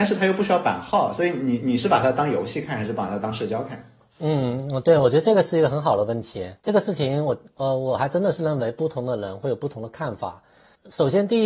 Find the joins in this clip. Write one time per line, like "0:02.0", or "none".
0:06.6

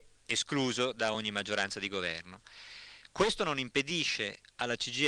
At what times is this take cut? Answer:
none

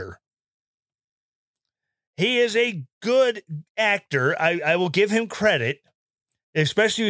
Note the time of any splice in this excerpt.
0:02.9

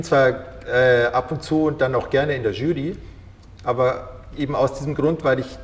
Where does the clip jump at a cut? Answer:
none

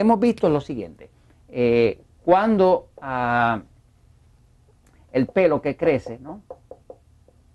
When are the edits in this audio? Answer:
none

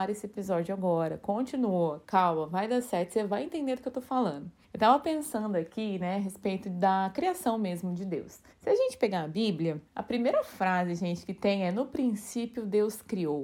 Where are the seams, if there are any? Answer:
0:08.5
0:09.9

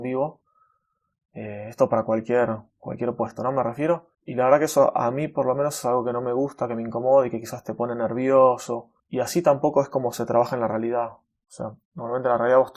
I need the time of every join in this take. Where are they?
0:02.7
0:04.1
0:09.0

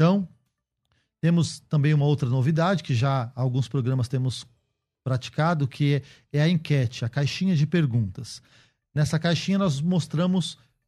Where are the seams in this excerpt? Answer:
none

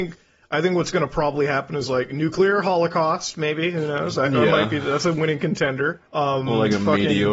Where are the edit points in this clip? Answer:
0:06.1

